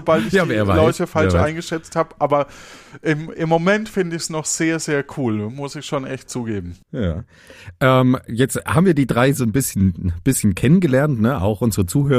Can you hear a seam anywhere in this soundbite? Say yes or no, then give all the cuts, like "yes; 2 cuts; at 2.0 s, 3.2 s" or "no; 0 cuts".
yes; 1 cut; at 6.8 s